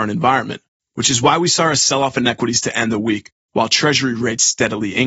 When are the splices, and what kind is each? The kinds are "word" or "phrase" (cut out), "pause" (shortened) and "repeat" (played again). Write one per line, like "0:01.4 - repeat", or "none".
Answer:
none